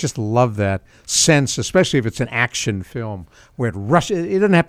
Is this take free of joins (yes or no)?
yes